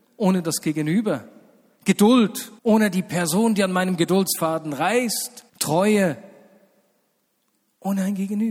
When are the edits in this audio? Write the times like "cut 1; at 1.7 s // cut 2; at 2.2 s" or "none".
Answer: cut 1; at 2.6 s // cut 2; at 5.5 s